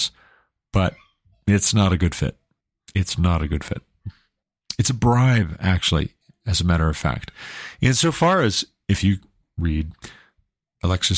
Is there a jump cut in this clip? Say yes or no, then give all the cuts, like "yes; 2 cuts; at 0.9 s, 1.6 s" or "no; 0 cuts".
no; 0 cuts